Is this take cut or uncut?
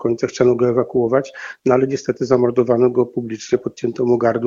uncut